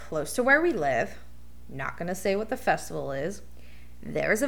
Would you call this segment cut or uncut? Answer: uncut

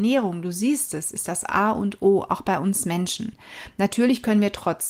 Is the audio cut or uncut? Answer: uncut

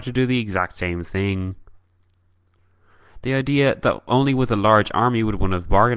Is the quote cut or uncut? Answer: uncut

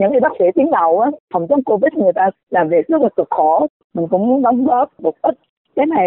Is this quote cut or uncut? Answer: uncut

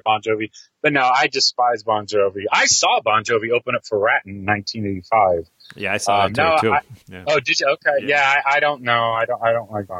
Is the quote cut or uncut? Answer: cut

